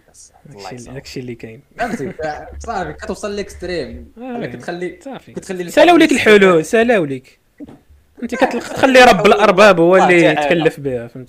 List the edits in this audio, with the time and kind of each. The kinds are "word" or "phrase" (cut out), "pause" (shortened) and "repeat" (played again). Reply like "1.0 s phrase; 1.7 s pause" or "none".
none